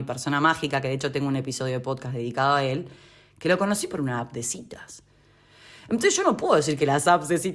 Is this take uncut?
yes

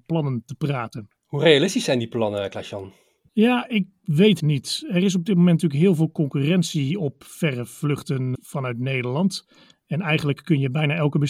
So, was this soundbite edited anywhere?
yes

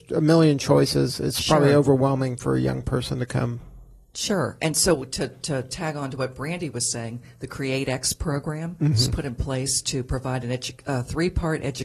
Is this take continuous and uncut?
yes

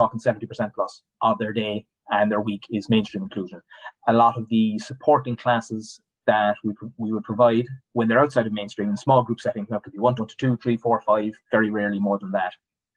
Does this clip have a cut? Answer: yes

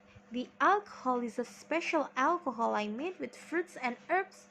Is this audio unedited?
yes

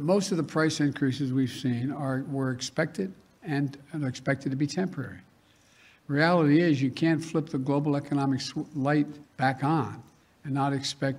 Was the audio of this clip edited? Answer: yes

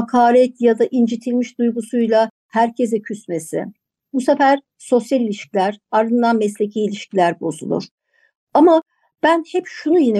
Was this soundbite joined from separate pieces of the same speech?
no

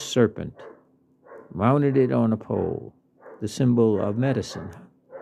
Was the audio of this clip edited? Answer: no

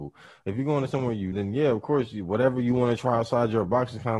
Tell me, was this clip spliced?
yes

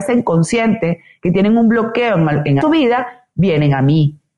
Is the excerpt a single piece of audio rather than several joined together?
no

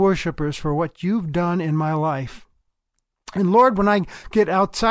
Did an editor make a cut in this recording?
no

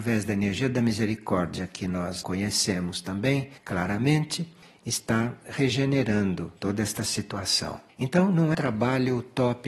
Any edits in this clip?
yes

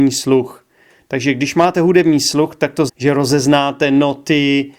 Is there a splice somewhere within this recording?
yes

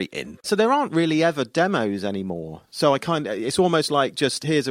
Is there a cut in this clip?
no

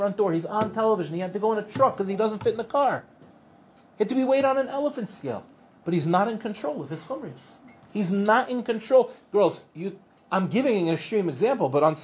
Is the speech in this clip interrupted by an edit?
no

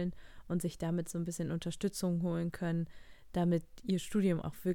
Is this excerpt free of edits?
yes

